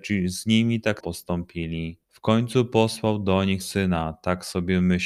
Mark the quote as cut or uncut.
cut